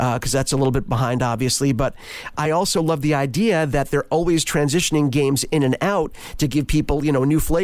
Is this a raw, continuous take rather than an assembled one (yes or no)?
yes